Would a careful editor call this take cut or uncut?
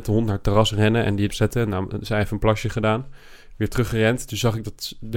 cut